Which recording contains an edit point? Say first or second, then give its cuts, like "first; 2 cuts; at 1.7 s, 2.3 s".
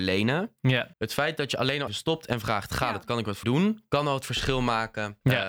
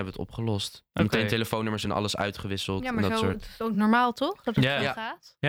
first; 3 cuts; at 0.9 s, 1.9 s, 3.4 s